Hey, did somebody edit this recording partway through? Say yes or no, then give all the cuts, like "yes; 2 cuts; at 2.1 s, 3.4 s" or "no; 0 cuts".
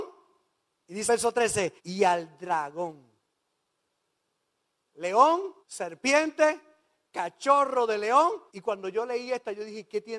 yes; 4 cuts; at 1.1 s, 1.8 s, 5.6 s, 8.5 s